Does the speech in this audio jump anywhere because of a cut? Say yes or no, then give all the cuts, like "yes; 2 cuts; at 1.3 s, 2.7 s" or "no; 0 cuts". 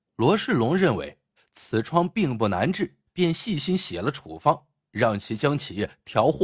yes; 1 cut; at 3.1 s